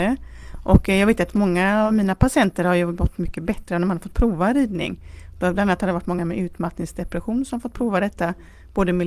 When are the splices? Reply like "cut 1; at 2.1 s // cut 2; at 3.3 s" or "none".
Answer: none